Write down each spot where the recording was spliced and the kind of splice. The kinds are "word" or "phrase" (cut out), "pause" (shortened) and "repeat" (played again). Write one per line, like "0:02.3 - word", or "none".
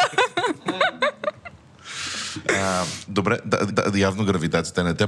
0:03.7 - repeat

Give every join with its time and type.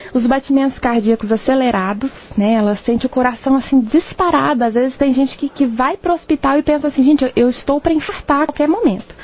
none

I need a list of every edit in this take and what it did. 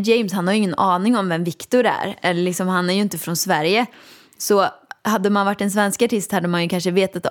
none

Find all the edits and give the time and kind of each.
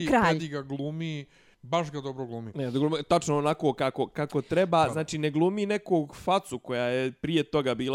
0:01.5 - pause

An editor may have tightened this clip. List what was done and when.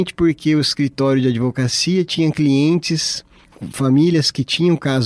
none

